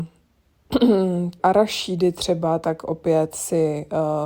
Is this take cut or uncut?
cut